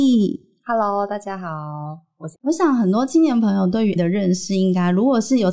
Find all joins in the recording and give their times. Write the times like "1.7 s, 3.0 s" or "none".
2.3 s, 4.0 s